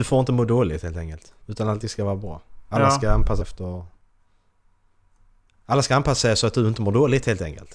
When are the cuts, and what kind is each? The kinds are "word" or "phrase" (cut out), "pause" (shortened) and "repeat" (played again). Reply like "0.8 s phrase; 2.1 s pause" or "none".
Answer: 1.4 s pause; 3.4 s word